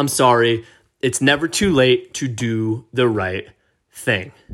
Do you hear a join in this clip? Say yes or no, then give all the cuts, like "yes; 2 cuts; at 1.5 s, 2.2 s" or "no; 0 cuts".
no; 0 cuts